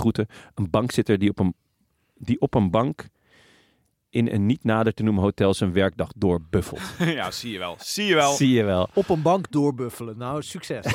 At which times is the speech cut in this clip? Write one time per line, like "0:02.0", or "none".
none

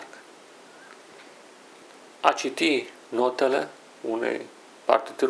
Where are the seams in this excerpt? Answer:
none

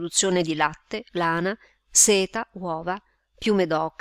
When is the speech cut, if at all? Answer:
none

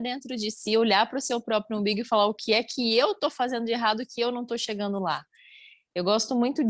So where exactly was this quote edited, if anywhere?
none

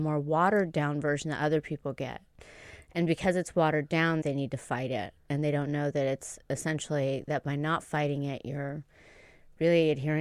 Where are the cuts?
0:04.2

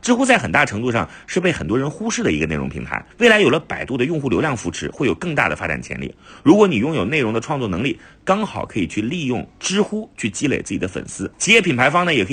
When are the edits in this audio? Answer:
0:03.1
0:11.3

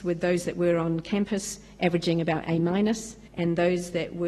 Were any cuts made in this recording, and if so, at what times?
0:03.3

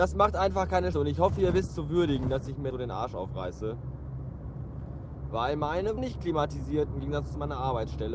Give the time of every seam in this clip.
0:00.9
0:01.7
0:02.7
0:06.0
0:06.9

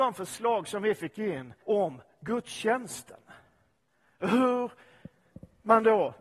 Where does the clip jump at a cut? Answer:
0:01.6

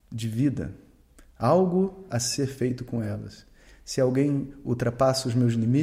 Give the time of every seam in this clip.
none

